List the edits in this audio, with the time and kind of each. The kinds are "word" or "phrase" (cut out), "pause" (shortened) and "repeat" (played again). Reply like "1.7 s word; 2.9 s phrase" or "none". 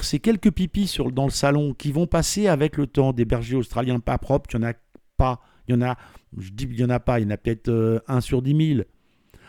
none

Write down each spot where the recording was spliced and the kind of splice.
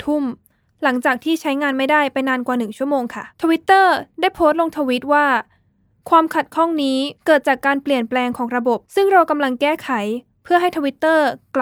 3.3 s pause; 7.2 s pause; 8.8 s pause

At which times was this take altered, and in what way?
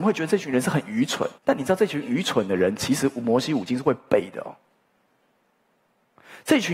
1.4 s pause

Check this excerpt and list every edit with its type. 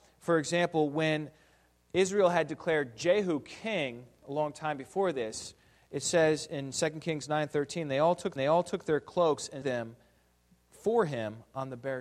8.4 s repeat; 9.6 s word

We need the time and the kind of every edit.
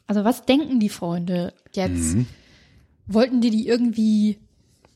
1.7 s word

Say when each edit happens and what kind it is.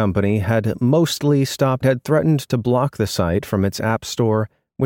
1.8 s phrase

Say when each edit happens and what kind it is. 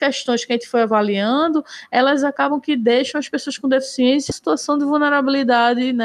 4.3 s word

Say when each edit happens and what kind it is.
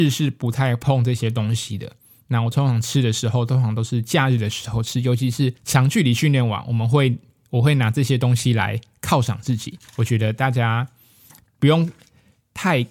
5.6 s pause; 9.9 s pause

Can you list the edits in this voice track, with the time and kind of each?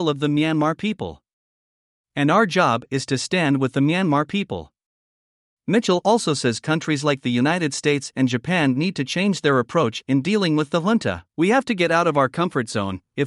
11.3 s pause

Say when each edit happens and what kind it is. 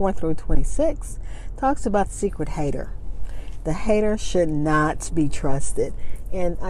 2.1 s word

